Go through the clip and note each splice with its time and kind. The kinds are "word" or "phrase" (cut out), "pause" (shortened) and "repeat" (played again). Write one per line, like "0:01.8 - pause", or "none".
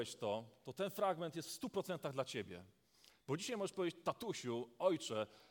none